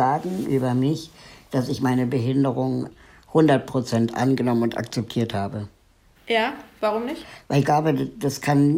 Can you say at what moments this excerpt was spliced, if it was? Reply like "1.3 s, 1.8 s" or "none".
none

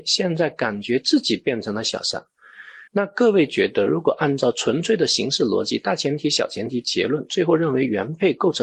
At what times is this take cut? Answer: 2.9 s

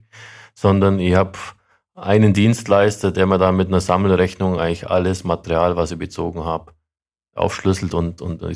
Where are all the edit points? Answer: none

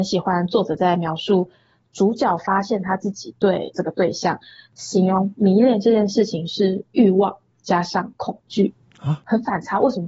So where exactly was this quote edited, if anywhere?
none

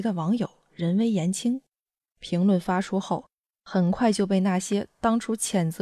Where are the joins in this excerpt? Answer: none

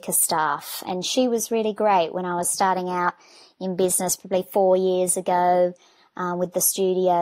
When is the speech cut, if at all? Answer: none

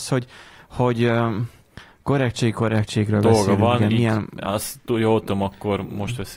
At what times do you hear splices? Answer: none

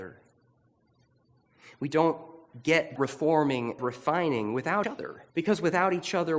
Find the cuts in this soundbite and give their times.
3.0 s, 3.8 s, 4.8 s, 5.3 s

